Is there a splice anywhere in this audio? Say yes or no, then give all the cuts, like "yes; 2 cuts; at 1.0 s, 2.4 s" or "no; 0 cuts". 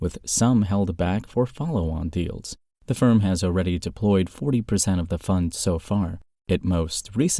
no; 0 cuts